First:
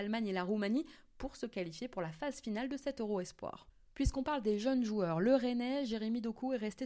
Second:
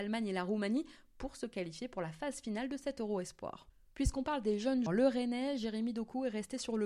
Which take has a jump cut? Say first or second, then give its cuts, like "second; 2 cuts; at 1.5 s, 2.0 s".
second; 1 cut; at 4.9 s